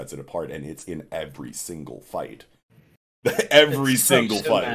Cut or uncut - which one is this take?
uncut